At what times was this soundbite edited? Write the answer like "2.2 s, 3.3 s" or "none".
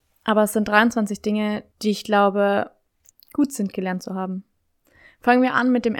1.7 s, 3.1 s